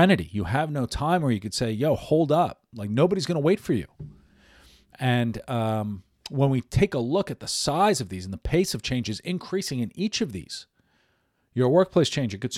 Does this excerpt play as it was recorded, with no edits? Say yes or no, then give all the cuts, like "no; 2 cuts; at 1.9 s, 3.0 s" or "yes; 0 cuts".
yes; 0 cuts